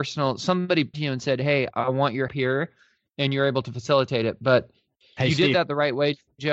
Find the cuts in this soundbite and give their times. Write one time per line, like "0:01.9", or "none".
0:00.9
0:02.3